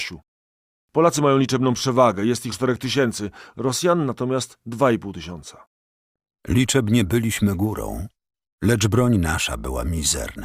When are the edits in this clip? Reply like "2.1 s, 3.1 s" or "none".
2.5 s